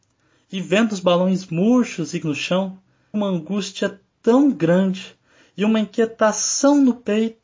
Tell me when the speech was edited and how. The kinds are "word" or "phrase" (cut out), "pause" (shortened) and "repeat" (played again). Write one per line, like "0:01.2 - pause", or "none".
0:02.2 - word
0:03.1 - word